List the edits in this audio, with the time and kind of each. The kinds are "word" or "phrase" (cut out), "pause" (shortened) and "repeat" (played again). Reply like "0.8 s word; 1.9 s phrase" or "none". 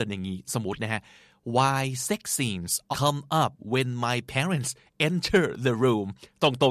2.9 s word